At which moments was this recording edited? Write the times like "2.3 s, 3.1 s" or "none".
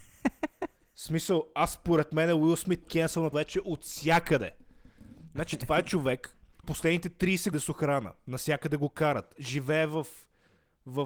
2.8 s, 3.3 s, 6.6 s, 7.5 s